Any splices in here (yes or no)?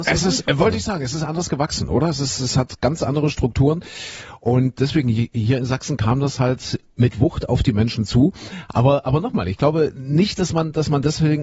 no